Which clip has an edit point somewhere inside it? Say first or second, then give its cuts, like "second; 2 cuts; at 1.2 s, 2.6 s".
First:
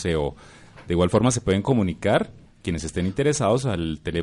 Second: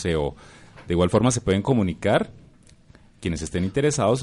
first; 1 cut; at 2.5 s